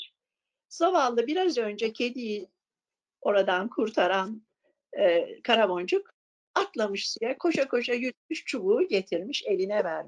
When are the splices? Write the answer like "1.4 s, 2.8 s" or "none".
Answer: none